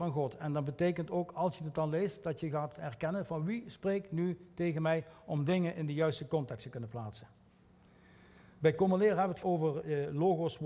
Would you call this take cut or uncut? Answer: cut